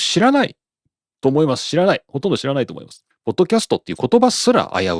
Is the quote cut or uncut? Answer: cut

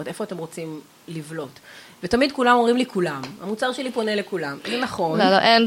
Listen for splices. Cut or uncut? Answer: uncut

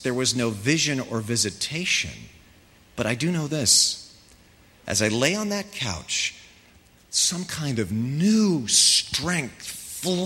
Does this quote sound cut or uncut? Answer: uncut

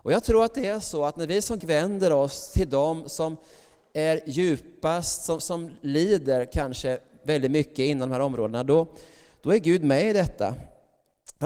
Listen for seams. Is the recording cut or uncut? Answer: cut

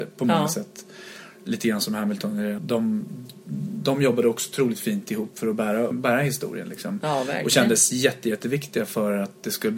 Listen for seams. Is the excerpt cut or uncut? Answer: cut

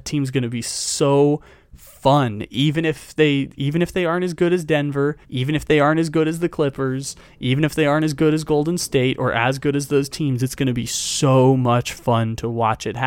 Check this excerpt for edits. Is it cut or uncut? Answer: cut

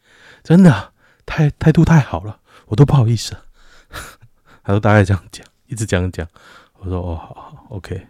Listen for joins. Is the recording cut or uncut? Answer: uncut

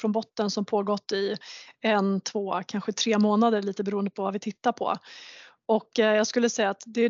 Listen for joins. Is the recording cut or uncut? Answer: uncut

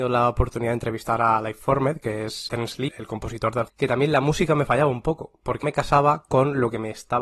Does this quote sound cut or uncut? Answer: cut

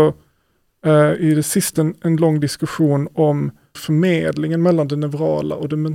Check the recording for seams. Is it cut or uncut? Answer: cut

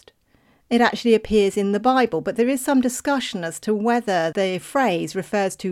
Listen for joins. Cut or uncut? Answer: cut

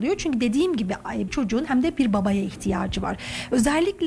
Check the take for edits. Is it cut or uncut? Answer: cut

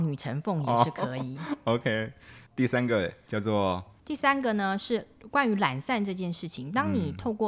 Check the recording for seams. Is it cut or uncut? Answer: cut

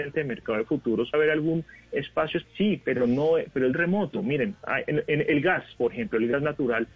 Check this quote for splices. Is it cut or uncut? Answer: cut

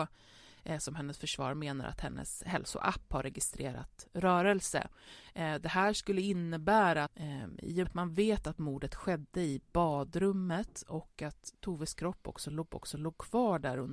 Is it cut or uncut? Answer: cut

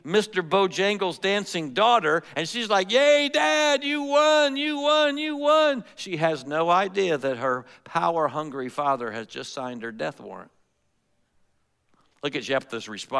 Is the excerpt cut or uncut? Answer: uncut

